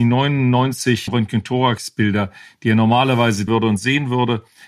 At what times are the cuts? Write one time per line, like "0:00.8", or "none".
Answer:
0:01.1
0:03.5